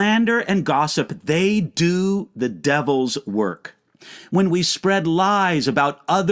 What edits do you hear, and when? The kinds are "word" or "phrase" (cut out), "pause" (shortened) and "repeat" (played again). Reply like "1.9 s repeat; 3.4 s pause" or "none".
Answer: none